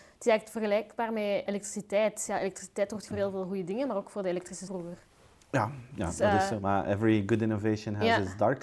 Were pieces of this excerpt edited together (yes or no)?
yes